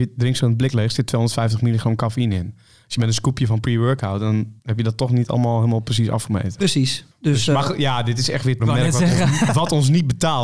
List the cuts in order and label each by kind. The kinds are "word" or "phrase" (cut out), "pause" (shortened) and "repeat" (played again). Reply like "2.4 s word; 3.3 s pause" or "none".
4.6 s pause; 7.1 s pause; 8.6 s phrase; 9.5 s word